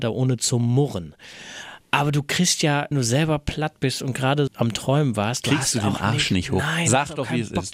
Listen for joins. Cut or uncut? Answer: cut